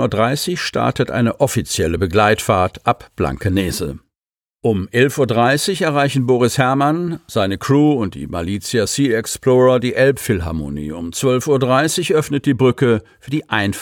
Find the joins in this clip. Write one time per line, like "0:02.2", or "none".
none